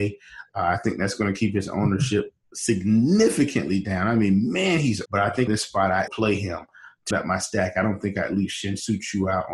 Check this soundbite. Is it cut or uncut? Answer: cut